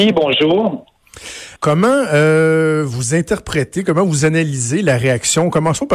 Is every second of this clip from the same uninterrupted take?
no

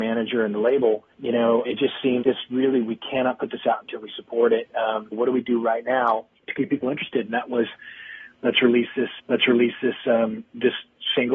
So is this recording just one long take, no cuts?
no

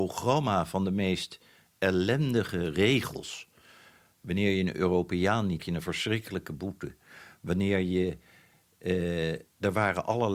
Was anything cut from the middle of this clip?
yes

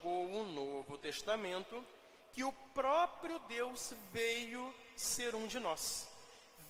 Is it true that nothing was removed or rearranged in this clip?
yes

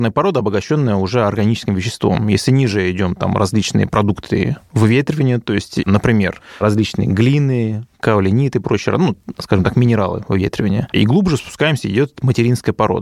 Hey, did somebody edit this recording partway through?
no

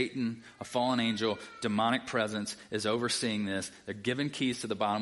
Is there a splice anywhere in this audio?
no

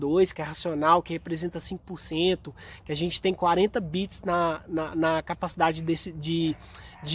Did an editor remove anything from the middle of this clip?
no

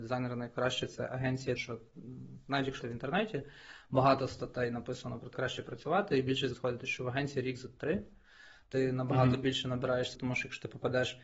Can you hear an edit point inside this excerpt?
yes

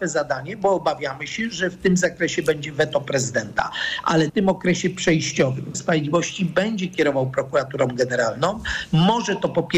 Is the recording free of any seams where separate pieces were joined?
no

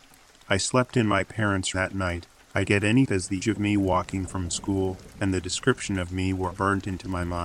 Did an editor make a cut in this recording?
yes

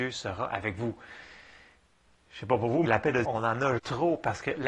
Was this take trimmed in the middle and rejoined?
yes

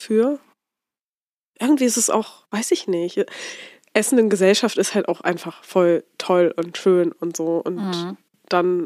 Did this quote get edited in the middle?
no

